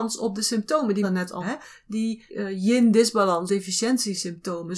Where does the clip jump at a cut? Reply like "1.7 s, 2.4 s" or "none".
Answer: 1.0 s, 1.4 s, 2.3 s, 3.5 s